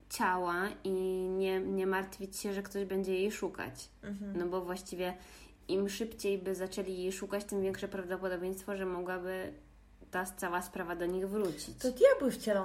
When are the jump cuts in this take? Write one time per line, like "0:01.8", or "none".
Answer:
none